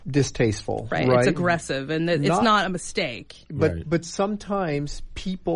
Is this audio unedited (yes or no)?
yes